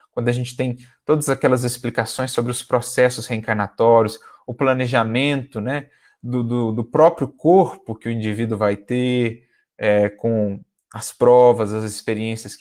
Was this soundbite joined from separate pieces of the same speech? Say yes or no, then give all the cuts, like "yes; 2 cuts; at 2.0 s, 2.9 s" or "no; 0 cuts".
no; 0 cuts